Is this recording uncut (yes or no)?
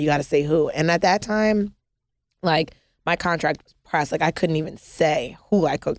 yes